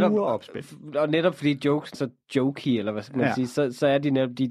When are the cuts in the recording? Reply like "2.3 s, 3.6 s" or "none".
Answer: 1.9 s